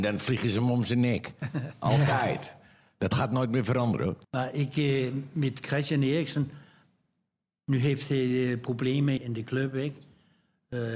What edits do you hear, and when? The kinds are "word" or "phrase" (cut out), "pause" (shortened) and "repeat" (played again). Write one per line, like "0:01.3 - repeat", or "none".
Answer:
0:04.2 - pause
0:09.2 - word

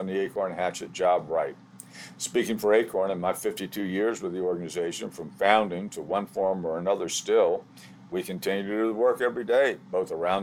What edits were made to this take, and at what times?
none

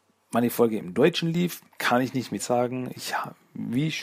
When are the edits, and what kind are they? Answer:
0:01.7 - pause
0:02.4 - word

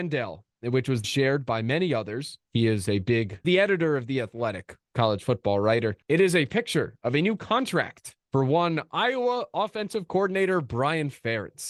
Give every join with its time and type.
0:01.0 - word
0:02.4 - pause
0:03.4 - word
0:06.0 - pause
0:08.2 - pause

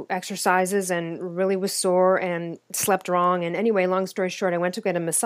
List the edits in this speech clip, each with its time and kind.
none

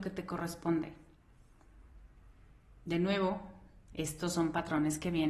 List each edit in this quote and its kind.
none

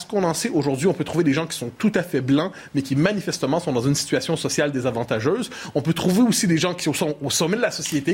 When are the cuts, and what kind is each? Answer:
none

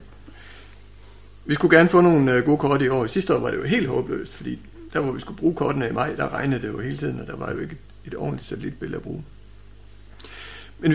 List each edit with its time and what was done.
none

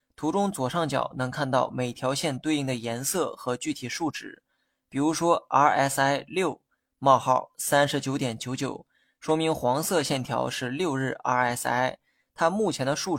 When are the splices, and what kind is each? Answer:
none

